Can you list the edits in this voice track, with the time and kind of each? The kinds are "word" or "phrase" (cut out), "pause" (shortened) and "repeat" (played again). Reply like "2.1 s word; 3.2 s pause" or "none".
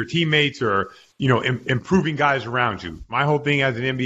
none